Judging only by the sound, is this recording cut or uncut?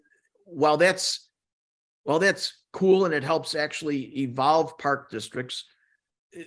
uncut